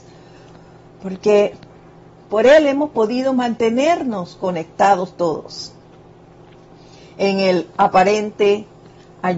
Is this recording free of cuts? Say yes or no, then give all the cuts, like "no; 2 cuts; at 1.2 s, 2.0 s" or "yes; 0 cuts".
yes; 0 cuts